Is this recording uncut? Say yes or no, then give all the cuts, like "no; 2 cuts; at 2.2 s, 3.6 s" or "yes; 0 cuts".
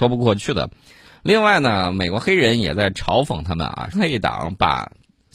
no; 1 cut; at 3.9 s